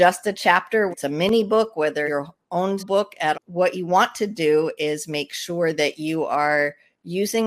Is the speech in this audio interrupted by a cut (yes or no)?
yes